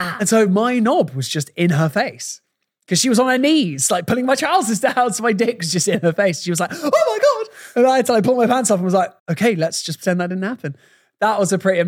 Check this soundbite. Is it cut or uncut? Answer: cut